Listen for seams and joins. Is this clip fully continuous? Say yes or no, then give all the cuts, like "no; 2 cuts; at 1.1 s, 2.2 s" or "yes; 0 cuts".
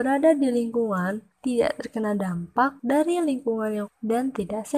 no; 3 cuts; at 1.3 s, 2.8 s, 3.9 s